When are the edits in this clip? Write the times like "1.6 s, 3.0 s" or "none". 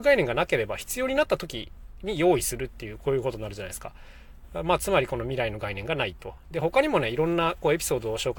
none